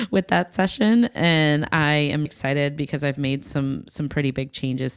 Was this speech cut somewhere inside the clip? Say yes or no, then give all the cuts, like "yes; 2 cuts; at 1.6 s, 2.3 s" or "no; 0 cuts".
yes; 1 cut; at 2.3 s